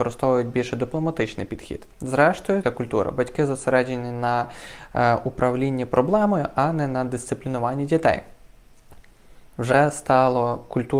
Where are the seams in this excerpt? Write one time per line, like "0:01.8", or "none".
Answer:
0:02.6